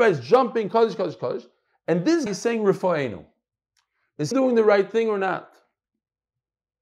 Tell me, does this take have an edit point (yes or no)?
yes